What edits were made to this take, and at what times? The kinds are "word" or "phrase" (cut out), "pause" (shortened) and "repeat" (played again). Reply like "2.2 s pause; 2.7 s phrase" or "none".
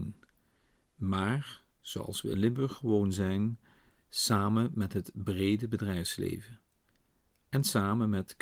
none